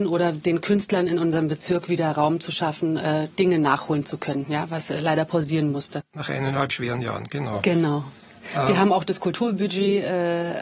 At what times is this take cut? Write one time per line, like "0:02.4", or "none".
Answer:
0:06.7

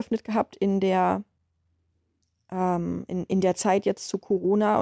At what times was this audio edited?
none

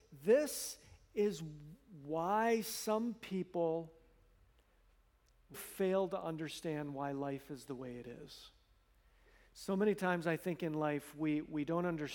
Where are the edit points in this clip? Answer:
0:05.5

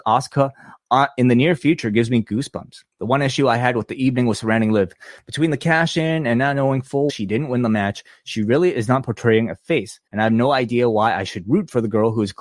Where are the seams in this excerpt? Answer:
0:02.9
0:07.1
0:10.1

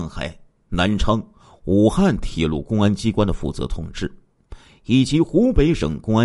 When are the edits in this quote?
none

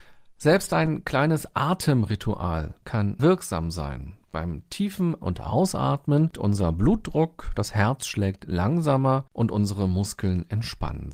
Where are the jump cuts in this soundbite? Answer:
0:03.2
0:05.2
0:06.3
0:09.3

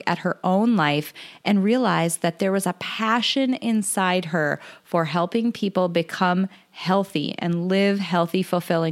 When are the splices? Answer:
none

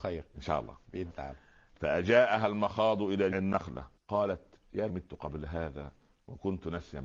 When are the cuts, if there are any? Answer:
0:01.1
0:03.3
0:04.0
0:04.9

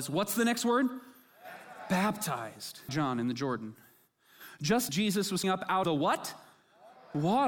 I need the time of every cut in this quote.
0:02.9
0:04.9
0:05.4
0:05.8

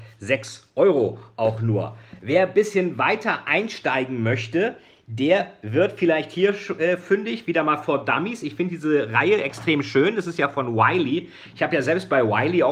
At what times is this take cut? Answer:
none

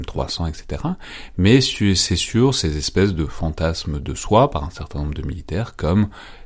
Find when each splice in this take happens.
none

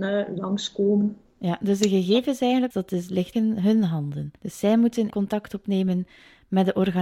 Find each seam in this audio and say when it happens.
0:02.7
0:03.3
0:04.4
0:05.1

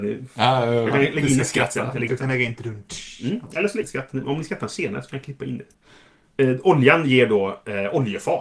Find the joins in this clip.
0:02.1
0:03.8

